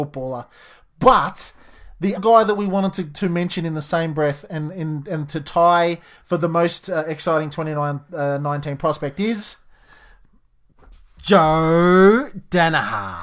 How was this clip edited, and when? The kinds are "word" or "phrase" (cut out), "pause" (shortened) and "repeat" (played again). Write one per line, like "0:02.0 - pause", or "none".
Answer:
0:02.2 - word